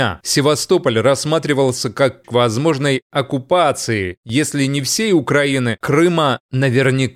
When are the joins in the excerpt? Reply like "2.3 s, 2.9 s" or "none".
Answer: 2.2 s, 5.8 s